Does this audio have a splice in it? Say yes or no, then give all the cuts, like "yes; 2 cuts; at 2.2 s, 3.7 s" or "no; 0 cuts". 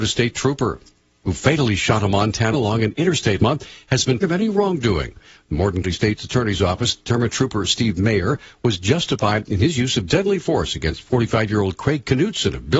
yes; 4 cuts; at 2.5 s, 3.4 s, 4.2 s, 5.8 s